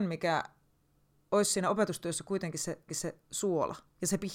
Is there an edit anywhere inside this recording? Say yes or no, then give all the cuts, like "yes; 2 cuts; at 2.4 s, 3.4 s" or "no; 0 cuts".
yes; 1 cut; at 2.9 s